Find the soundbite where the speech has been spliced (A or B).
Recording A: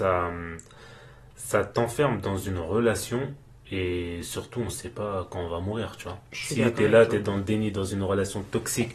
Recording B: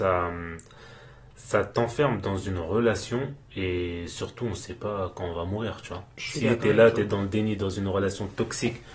B